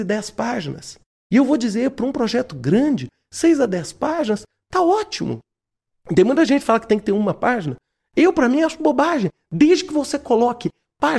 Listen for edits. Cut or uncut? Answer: uncut